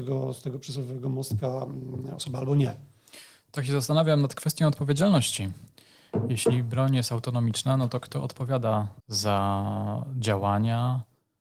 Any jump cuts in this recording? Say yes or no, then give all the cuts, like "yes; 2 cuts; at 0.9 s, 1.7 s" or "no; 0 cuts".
yes; 1 cut; at 9.0 s